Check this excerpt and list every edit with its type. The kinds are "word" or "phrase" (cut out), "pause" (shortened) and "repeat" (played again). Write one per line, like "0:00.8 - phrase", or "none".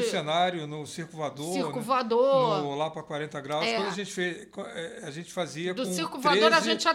none